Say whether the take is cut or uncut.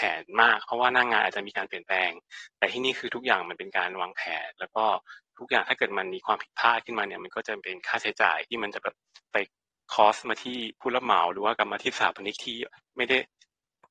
cut